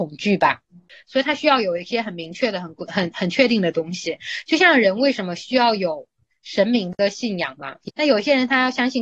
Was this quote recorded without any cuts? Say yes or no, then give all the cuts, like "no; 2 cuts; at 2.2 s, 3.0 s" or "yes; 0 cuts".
no; 1 cut; at 2.9 s